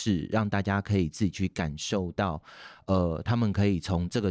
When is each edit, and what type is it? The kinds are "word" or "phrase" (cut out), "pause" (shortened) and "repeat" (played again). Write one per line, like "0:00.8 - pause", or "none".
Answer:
none